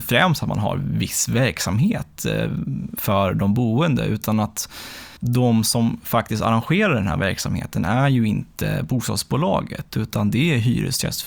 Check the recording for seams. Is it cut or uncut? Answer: cut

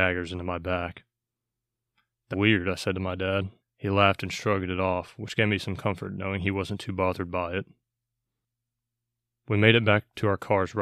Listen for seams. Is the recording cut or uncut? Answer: cut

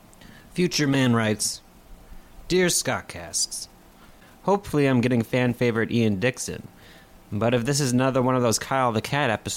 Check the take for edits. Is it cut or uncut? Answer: uncut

